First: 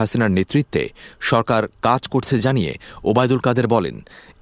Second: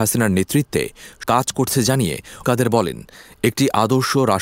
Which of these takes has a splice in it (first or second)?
second